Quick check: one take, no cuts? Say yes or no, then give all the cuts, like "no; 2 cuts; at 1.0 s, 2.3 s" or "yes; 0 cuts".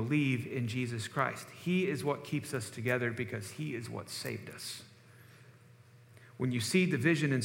yes; 0 cuts